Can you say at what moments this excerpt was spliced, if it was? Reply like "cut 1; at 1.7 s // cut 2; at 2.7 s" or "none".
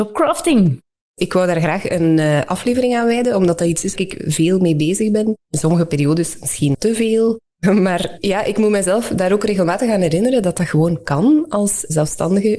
cut 1; at 4.0 s // cut 2; at 6.7 s